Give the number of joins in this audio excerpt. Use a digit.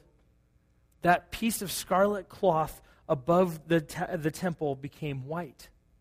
0